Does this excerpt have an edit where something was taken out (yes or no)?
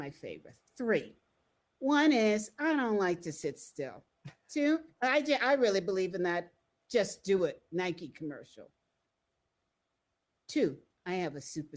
no